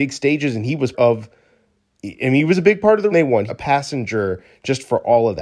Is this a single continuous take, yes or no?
no